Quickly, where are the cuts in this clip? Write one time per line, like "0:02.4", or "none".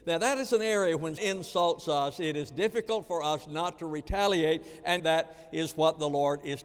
0:01.2
0:05.0